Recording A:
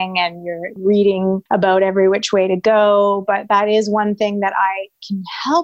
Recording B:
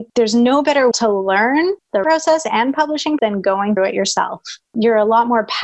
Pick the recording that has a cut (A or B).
B